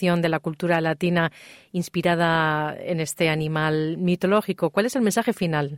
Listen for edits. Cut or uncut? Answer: uncut